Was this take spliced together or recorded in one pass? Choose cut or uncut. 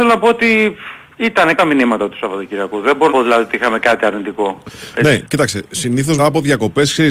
cut